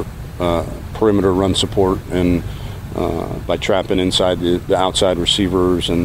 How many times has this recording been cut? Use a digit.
0